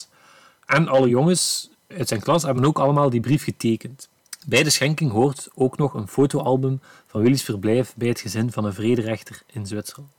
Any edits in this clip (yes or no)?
no